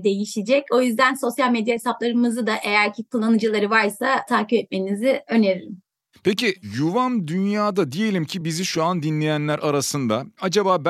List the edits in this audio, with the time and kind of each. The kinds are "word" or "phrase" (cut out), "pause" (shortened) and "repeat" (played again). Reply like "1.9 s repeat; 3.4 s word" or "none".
none